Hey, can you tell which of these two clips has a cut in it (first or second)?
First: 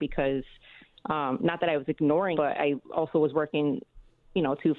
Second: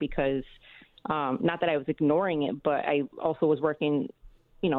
first